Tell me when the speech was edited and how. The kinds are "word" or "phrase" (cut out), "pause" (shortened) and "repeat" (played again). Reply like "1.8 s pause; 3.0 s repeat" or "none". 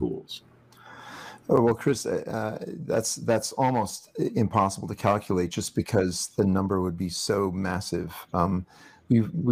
none